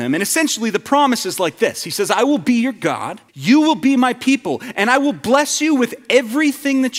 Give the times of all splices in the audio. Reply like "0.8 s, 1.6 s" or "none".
3.3 s